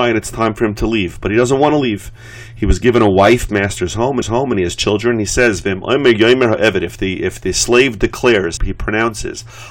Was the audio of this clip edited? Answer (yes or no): yes